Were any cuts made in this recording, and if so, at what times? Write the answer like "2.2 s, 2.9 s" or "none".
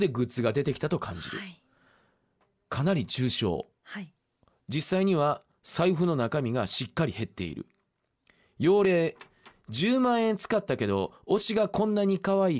none